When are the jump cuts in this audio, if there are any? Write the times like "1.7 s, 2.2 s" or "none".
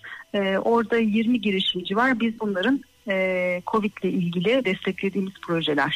2.4 s, 4.6 s